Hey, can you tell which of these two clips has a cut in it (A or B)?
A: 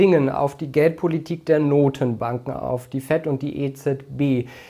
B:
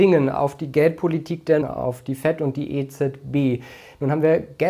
B